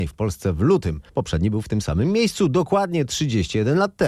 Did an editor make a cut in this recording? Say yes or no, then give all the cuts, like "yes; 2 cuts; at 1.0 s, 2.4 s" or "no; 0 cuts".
yes; 1 cut; at 1.1 s